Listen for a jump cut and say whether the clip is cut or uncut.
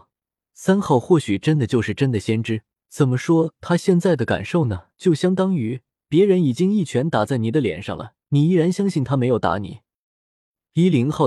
cut